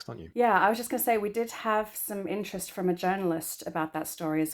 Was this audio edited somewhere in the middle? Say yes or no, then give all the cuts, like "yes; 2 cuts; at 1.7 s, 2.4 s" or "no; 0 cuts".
no; 0 cuts